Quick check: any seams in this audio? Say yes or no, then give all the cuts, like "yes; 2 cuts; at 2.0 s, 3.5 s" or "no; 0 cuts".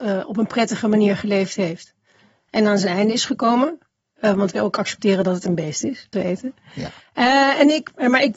yes; 2 cuts; at 4.5 s, 6.1 s